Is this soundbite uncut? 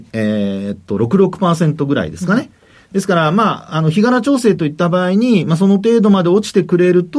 yes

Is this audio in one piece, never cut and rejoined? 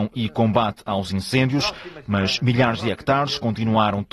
yes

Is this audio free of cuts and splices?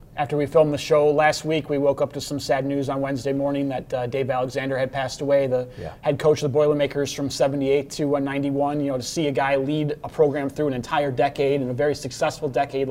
yes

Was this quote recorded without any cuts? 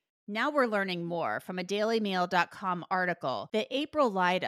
yes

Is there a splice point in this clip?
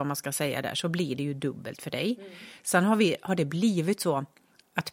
no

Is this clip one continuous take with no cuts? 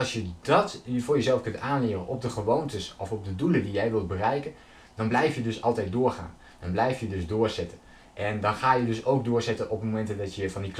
yes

